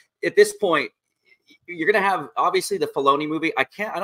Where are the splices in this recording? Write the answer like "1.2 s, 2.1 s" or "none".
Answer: none